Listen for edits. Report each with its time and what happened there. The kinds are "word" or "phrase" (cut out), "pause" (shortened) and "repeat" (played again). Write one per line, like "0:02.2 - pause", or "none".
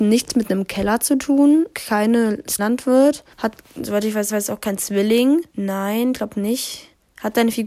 0:01.7 - word
0:02.6 - word
0:03.3 - pause
0:04.3 - repeat
0:05.5 - pause